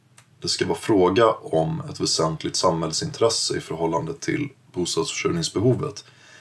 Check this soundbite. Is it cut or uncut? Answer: uncut